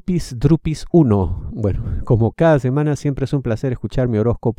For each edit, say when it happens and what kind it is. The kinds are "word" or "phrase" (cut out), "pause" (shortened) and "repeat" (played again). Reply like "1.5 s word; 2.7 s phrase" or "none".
none